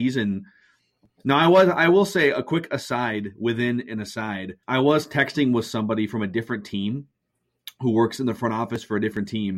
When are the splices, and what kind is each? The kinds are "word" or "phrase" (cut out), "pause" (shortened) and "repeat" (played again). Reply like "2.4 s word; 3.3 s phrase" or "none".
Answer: 4.6 s pause